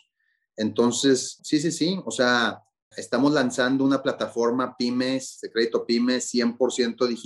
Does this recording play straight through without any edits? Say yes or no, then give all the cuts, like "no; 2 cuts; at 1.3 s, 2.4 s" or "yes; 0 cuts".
no; 2 cuts; at 1.4 s, 2.9 s